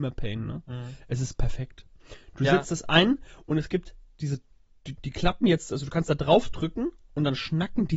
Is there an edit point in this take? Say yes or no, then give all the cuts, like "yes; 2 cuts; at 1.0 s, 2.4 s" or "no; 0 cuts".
no; 0 cuts